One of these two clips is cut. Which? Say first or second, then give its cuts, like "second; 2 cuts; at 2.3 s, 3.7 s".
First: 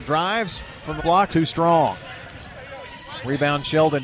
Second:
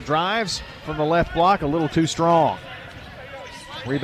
first; 2 cuts; at 1.0 s, 1.3 s